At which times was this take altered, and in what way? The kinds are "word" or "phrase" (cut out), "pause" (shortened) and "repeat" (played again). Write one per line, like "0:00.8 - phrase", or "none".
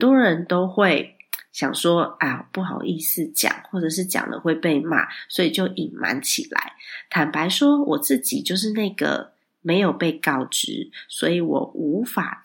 none